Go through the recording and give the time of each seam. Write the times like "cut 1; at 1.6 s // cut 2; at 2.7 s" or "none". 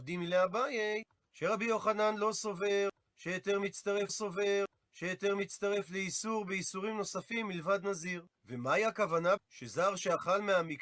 cut 1; at 4.1 s // cut 2; at 9.4 s